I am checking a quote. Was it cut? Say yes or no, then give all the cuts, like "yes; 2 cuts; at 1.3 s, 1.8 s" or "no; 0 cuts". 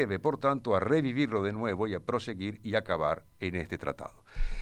no; 0 cuts